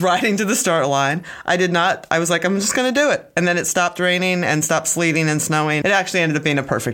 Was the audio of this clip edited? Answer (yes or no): yes